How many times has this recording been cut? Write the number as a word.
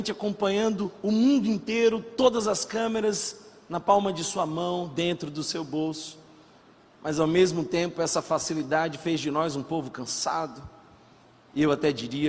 zero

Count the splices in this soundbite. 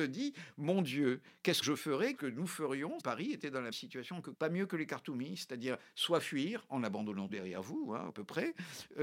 seven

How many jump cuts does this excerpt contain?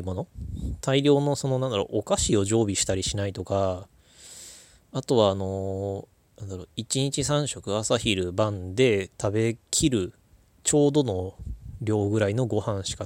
zero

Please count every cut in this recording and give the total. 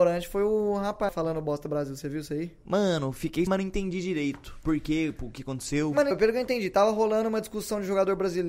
three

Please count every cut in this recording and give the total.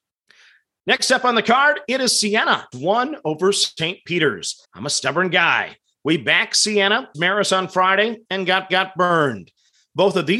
four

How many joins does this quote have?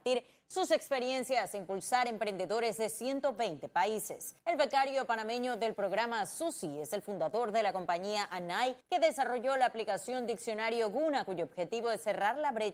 two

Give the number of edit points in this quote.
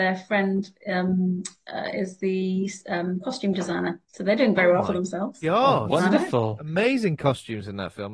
one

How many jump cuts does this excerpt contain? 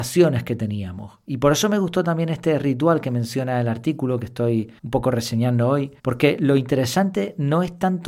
two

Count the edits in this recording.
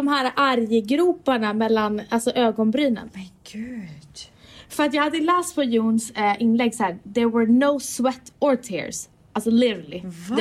zero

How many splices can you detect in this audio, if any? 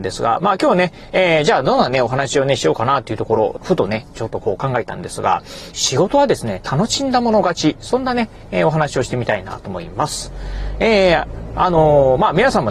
two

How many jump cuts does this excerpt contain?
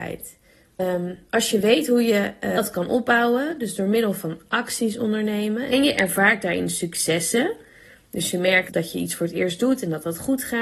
one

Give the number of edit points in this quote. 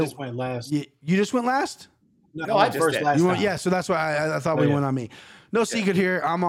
one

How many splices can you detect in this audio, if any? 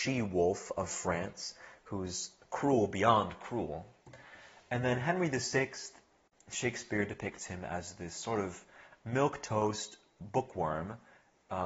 zero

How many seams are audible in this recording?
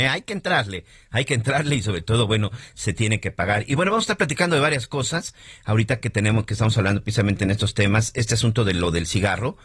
zero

